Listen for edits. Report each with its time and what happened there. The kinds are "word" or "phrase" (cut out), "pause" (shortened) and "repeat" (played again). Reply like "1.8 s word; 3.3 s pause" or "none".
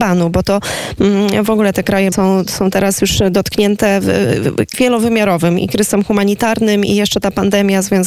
2.1 s word; 4.7 s word

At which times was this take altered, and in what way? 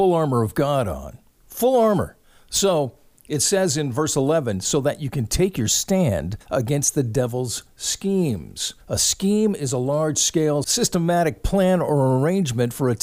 2.2 s pause; 6.4 s pause; 8.8 s pause

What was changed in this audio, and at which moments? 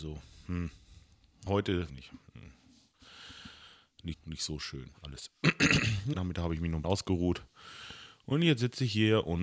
1.5 s word; 1.9 s phrase; 4.1 s word; 4.9 s pause; 6.1 s word; 6.8 s word

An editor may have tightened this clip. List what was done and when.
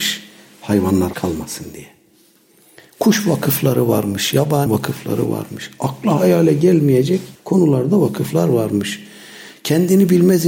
1.1 s word; 4.7 s word; 7.4 s pause

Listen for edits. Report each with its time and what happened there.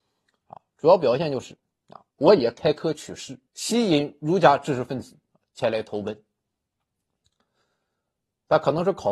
2.1 s pause; 3.5 s pause

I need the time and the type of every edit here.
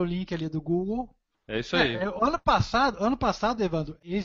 none

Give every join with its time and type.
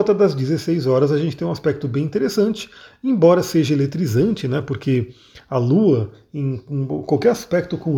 none

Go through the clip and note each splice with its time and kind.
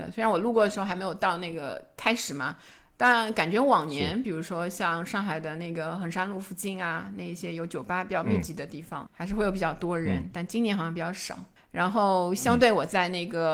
9.1 s word; 11.6 s pause

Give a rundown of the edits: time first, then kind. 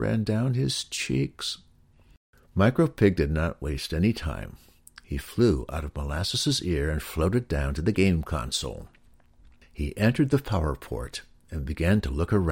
none

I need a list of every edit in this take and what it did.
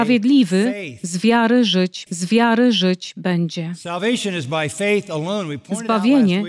2.1 s repeat

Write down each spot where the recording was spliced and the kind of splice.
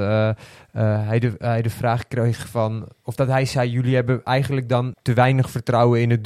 4.9 s word

